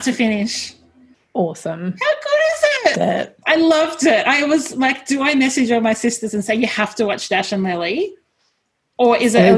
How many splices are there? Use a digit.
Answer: 1